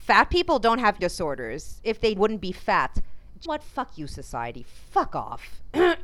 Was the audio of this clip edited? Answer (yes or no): yes